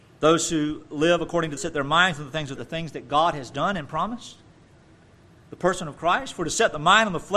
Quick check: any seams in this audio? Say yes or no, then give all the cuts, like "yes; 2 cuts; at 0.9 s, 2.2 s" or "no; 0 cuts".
yes; 2 cuts; at 1.6 s, 2.6 s